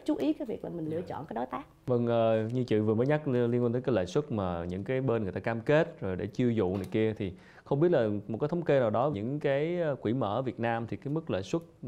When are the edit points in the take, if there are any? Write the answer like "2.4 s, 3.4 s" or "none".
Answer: 9.1 s